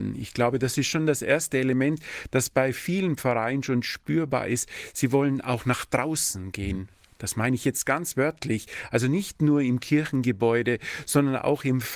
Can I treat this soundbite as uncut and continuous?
yes; 0 cuts

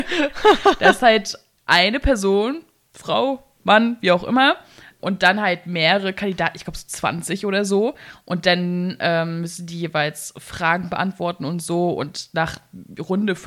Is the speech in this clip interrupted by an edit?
no; 0 cuts

